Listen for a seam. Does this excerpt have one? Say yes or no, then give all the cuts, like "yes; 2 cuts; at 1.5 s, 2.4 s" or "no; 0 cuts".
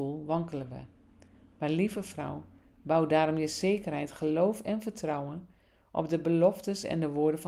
no; 0 cuts